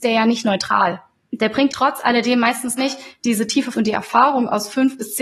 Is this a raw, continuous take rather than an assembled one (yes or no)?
no